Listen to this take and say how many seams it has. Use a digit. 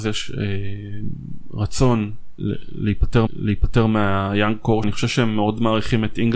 3